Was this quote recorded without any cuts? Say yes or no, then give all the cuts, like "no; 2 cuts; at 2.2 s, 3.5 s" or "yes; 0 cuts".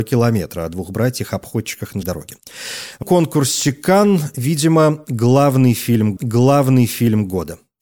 no; 3 cuts; at 2.0 s, 3.0 s, 6.2 s